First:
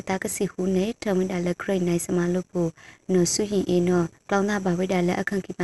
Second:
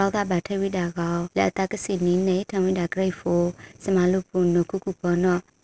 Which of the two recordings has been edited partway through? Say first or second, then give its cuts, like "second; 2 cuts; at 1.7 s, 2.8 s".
second; 1 cut; at 1.3 s